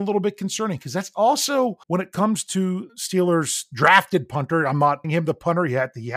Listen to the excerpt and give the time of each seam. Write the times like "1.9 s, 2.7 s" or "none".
1.8 s, 2.9 s, 5.0 s